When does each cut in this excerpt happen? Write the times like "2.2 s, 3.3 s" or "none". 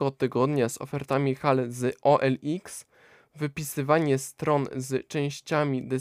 none